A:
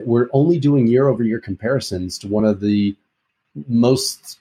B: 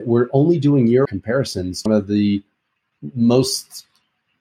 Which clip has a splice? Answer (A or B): B